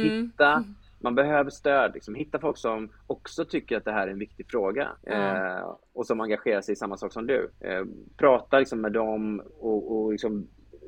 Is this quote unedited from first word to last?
no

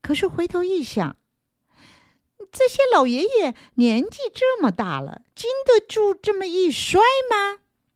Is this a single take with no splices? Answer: no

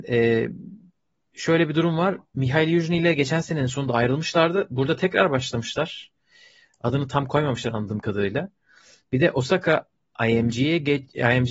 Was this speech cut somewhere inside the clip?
no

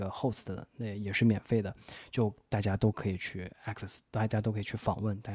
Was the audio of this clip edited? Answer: no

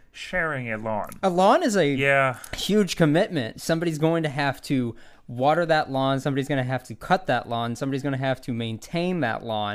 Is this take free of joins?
yes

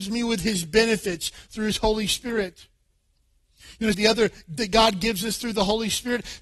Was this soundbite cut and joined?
yes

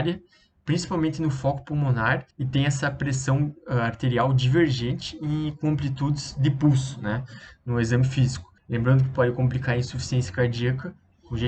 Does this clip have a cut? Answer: yes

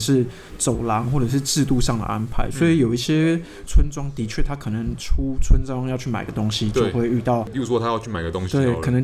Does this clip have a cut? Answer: no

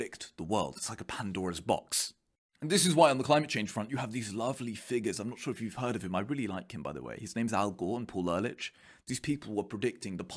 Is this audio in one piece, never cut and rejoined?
yes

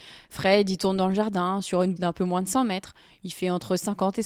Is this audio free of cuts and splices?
no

